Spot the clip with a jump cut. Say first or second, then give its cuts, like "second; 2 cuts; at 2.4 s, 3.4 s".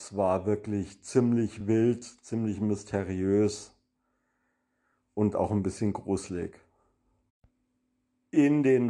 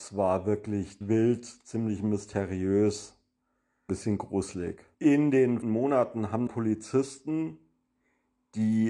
second; 5 cuts; at 1.0 s, 3.9 s, 4.9 s, 5.6 s, 6.5 s